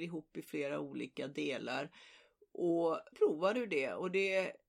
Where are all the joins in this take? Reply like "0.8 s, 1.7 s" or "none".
3.1 s